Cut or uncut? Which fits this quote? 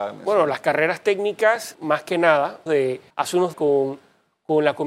cut